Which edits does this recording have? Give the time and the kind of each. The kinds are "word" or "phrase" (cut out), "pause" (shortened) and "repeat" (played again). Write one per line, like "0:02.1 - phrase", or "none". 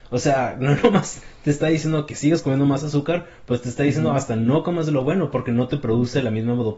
none